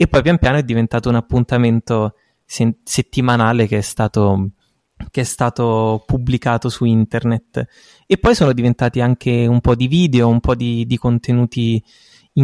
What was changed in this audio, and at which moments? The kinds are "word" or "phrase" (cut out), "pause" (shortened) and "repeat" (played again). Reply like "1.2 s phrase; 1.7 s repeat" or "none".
none